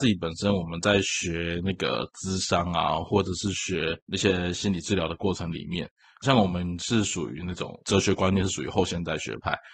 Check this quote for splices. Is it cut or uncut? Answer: cut